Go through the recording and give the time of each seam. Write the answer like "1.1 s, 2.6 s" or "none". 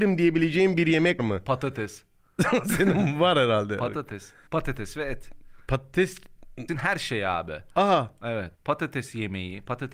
1.2 s, 4.5 s, 6.7 s, 8.5 s